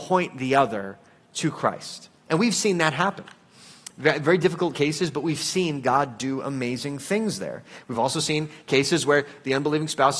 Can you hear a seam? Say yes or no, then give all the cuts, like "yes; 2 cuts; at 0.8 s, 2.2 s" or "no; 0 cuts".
no; 0 cuts